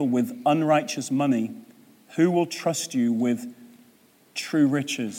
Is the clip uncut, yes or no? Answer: yes